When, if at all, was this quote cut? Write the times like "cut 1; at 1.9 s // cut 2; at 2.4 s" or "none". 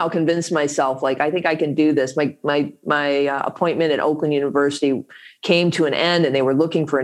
none